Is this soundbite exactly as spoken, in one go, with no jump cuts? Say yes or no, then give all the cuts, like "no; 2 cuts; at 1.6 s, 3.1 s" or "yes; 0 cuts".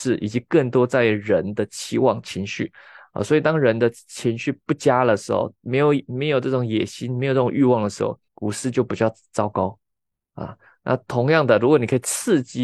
no; 2 cuts; at 5.6 s, 8.3 s